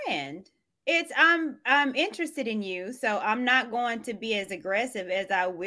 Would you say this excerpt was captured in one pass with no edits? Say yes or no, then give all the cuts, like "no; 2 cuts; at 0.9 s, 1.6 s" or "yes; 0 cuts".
yes; 0 cuts